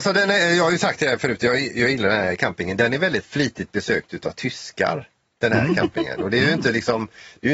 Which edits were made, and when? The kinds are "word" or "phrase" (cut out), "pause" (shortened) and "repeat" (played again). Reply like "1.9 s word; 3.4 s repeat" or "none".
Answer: none